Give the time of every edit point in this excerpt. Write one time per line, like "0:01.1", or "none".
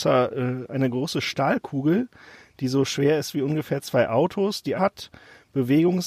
0:04.8